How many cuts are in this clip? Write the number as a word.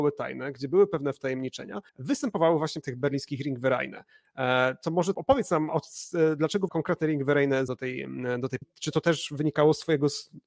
seven